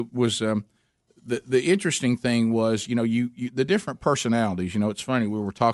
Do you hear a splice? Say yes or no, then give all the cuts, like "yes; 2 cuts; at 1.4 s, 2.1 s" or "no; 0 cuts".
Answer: no; 0 cuts